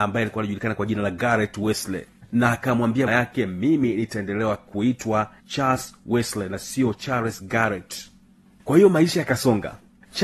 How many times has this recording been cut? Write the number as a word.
one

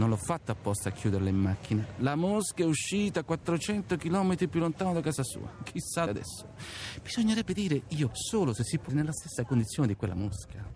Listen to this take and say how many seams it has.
three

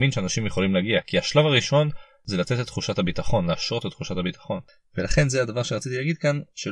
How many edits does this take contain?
zero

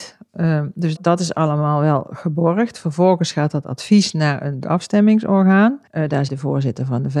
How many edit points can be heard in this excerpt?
four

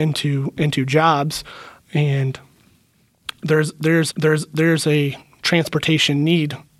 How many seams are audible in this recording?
one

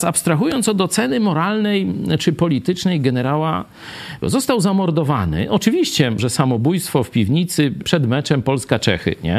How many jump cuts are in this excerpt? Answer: three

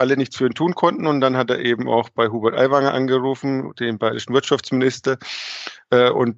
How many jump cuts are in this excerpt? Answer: zero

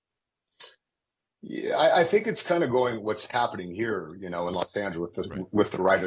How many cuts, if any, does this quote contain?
zero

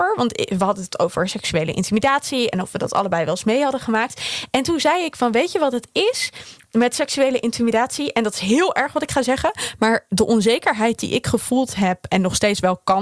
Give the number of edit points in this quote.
zero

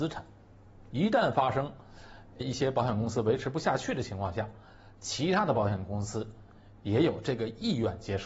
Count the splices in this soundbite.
one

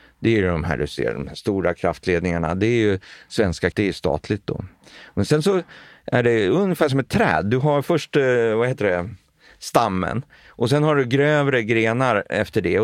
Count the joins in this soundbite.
one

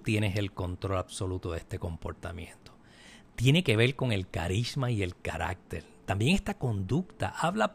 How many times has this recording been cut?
zero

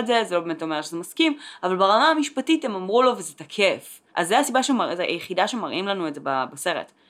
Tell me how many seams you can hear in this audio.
one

